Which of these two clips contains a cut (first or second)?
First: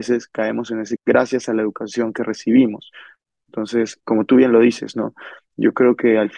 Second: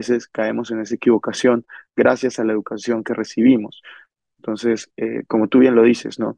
first